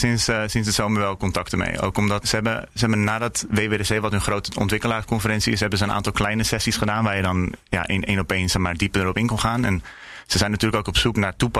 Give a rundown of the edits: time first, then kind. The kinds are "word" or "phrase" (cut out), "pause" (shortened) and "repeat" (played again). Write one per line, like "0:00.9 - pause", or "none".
0:02.2 - word

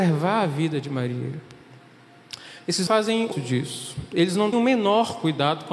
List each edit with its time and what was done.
0:02.9 - word
0:03.3 - word
0:04.5 - word

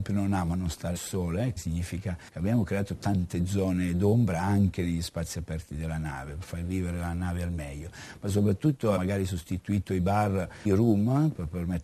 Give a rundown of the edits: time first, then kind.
0:01.0 - word
0:01.6 - word
0:09.0 - word
0:10.7 - phrase

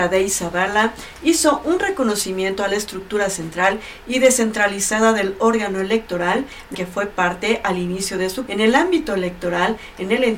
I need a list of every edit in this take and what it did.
0:06.7 - word
0:08.5 - word

